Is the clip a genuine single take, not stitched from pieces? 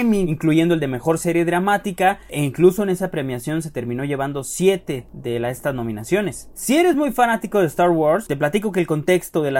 yes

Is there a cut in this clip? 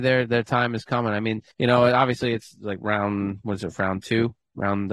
yes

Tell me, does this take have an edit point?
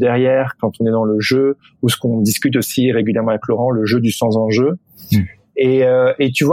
no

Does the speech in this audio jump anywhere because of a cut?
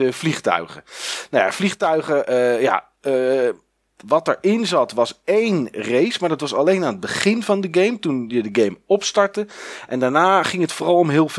no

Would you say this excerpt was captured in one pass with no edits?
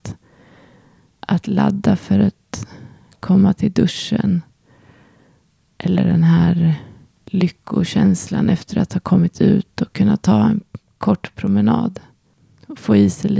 yes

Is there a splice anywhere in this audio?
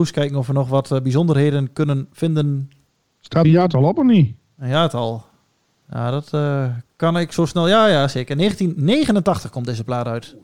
yes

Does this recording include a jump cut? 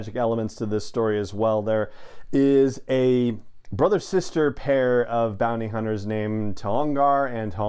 no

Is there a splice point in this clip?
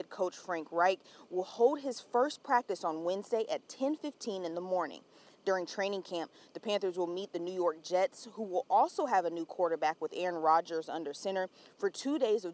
no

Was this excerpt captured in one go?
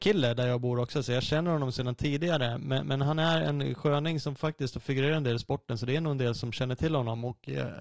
yes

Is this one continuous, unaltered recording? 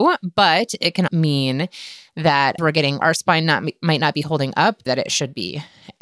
no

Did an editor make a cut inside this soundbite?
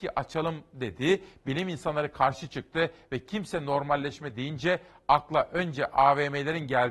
no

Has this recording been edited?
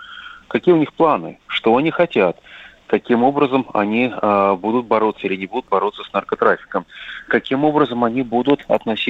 yes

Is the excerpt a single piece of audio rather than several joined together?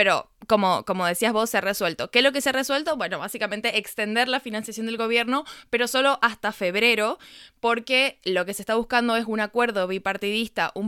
yes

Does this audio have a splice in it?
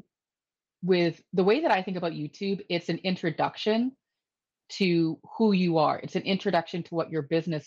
no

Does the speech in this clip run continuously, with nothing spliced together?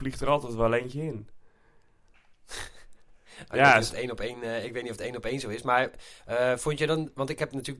yes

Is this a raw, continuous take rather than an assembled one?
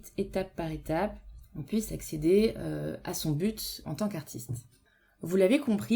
yes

